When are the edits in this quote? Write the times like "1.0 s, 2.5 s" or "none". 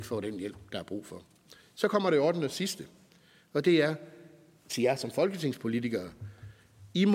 none